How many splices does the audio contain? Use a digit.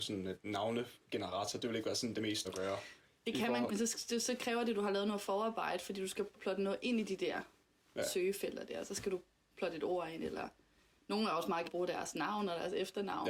4